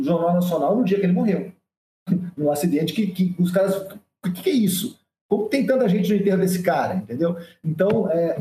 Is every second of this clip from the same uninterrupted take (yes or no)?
yes